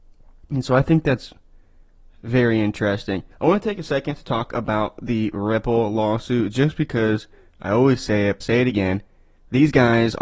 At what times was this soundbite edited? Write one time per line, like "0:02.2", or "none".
0:03.3
0:08.4